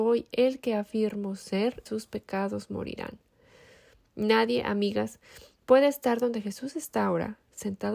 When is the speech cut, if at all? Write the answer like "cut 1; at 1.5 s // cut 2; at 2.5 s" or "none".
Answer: cut 1; at 1.9 s